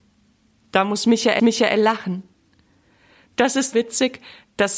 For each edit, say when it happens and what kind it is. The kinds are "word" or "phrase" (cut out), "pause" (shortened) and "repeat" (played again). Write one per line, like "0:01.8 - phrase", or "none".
0:01.4 - repeat
0:03.7 - word

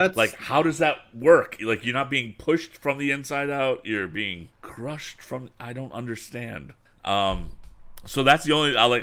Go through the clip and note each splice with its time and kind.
0:04.5 - pause
0:06.9 - pause

